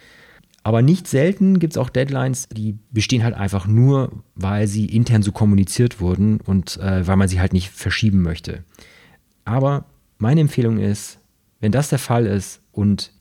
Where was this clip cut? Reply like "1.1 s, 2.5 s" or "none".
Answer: none